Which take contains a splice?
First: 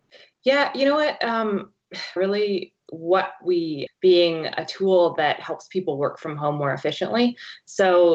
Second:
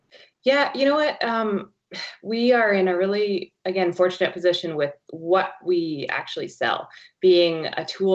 first; 3 cuts; at 2.2 s, 2.8 s, 3.9 s

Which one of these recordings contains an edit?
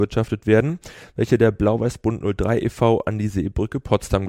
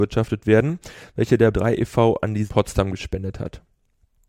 second; 2 cuts; at 1.5 s, 2.5 s

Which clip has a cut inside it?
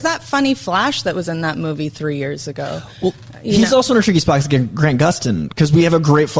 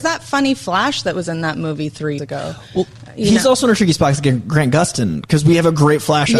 second; 1 cut; at 2.2 s

